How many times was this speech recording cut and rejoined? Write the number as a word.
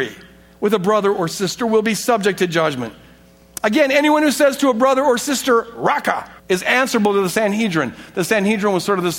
one